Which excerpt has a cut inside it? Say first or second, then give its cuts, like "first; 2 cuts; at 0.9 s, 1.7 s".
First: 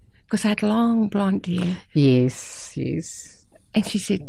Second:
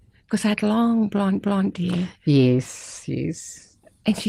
second; 1 cut; at 1.4 s